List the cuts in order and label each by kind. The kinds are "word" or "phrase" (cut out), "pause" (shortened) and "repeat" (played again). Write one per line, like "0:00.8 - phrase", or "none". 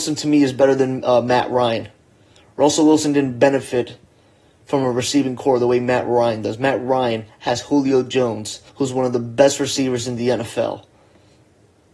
0:08.7 - pause